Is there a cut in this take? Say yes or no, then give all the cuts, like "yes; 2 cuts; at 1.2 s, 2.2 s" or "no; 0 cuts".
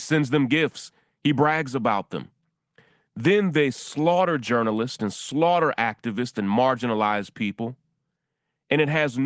no; 0 cuts